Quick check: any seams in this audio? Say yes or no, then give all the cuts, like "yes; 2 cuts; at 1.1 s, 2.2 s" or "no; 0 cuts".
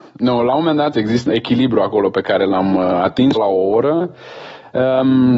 yes; 3 cuts; at 0.9 s, 1.3 s, 3.4 s